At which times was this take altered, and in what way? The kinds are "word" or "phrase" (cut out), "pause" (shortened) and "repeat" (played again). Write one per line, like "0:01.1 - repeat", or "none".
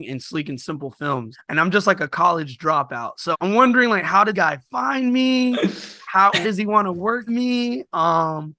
0:01.3 - word
0:03.3 - word
0:04.3 - word
0:06.4 - word
0:07.3 - word